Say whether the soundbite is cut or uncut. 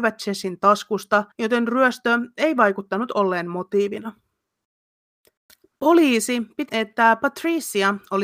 cut